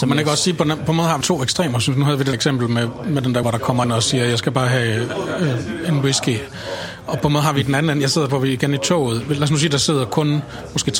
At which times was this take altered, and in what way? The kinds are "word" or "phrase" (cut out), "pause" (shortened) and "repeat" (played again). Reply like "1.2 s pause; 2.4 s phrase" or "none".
1.2 s word; 2.3 s word; 3.4 s word; 3.8 s phrase; 8.3 s word